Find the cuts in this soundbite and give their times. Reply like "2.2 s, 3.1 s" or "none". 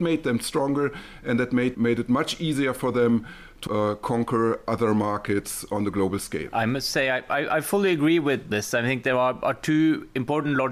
1.7 s, 3.7 s, 8.5 s